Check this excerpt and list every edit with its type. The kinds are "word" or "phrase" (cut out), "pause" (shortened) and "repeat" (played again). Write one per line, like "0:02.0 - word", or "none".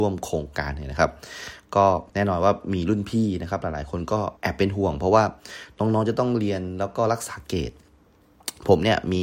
0:02.1 - pause
0:04.4 - pause